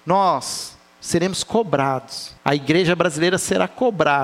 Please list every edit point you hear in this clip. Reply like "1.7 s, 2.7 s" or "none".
2.4 s